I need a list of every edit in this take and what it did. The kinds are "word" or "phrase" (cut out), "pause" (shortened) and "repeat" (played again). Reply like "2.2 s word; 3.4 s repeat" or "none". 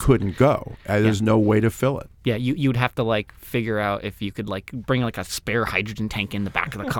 2.1 s pause